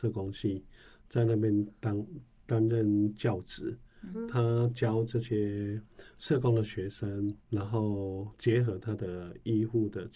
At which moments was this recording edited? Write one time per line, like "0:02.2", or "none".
0:07.4